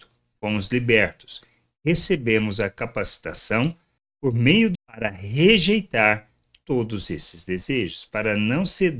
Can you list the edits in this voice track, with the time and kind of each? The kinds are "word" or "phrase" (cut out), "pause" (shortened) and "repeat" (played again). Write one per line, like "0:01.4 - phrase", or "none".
0:04.7 - word